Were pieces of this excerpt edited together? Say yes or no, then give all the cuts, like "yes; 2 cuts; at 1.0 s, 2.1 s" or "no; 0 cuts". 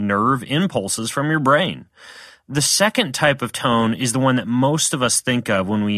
no; 0 cuts